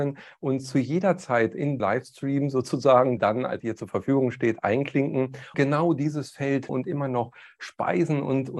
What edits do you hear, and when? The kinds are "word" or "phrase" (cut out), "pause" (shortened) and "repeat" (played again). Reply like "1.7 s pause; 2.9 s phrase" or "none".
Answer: 1.8 s word; 3.2 s word; 3.6 s word; 5.5 s word; 6.7 s word

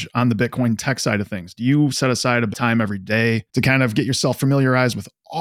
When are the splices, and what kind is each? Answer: 2.5 s word; 3.5 s pause

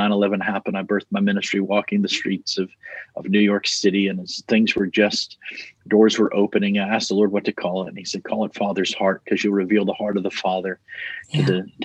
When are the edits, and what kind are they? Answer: none

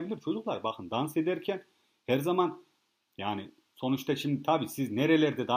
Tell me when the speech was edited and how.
none

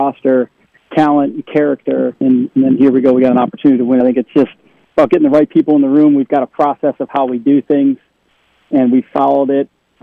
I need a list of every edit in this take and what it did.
2.2 s word; 4.0 s phrase

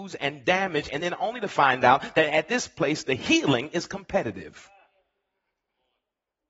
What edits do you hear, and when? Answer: none

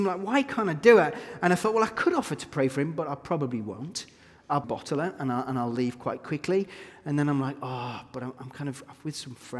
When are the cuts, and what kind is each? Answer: 4.6 s word

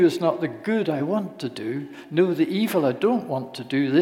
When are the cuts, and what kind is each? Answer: none

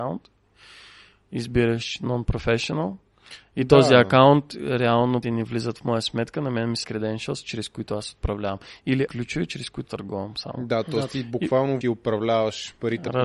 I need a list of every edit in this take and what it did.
5.2 s word; 5.8 s word; 6.8 s word; 9.1 s word; 9.9 s word; 11.8 s word

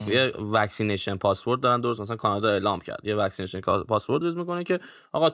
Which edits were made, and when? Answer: 4.2 s word

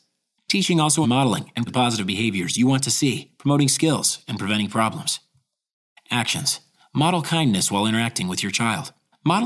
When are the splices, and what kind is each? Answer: 1.0 s word; 1.7 s word

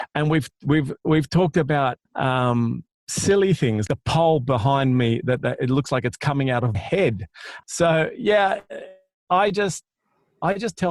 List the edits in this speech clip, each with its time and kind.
2.1 s pause; 3.9 s word; 6.7 s word

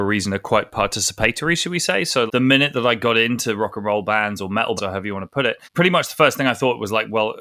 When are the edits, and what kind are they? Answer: 2.3 s word; 4.8 s word; 5.6 s pause

